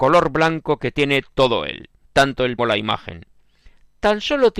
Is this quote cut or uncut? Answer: cut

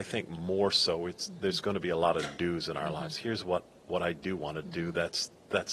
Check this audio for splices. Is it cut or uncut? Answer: uncut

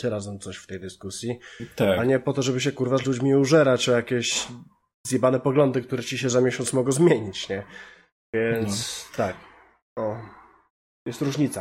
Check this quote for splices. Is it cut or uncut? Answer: uncut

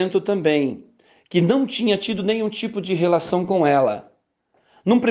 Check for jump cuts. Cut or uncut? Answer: uncut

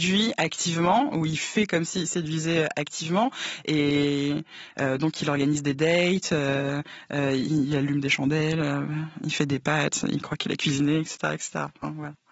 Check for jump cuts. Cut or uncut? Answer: uncut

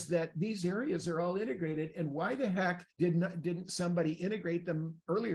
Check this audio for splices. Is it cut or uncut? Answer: cut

